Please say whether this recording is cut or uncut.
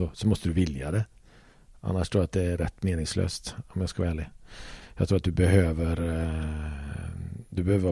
uncut